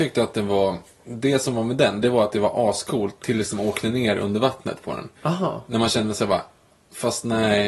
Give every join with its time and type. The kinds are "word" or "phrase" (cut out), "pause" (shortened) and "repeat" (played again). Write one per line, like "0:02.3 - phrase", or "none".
none